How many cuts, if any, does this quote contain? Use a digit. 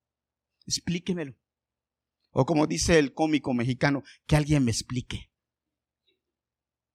0